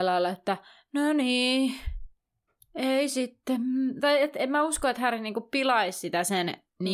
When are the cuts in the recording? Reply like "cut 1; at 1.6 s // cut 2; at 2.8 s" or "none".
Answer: none